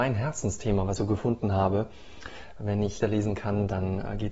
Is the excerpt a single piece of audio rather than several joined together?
no; 2 cuts; at 1.0 s, 3.0 s

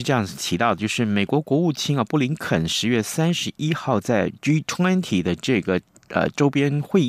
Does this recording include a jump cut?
no; 0 cuts

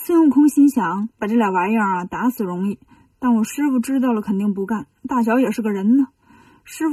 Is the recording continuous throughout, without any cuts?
no; 1 cut; at 1.1 s

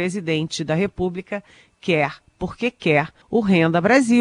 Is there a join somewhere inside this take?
yes; 1 cut; at 3.2 s

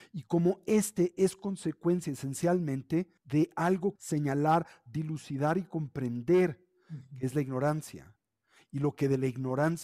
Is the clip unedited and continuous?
no; 2 cuts; at 3.2 s, 4.0 s

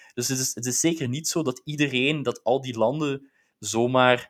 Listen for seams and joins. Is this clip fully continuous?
yes; 0 cuts

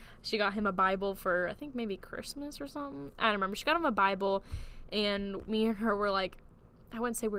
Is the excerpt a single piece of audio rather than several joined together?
yes; 0 cuts

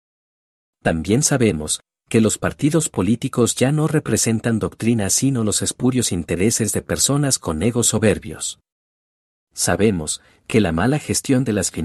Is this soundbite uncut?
yes; 0 cuts

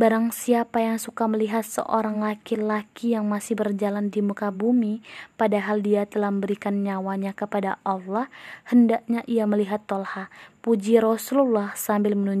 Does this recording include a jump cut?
no; 0 cuts

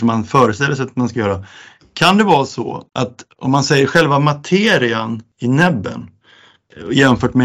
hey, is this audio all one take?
yes; 0 cuts

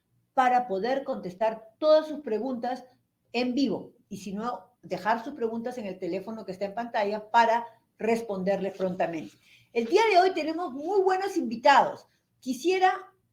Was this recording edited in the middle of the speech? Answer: no; 0 cuts

